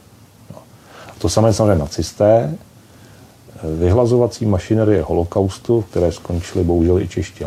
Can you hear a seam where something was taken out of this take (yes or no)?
no